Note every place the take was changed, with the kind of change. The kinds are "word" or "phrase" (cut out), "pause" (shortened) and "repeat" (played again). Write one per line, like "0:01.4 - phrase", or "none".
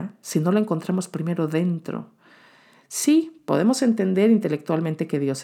none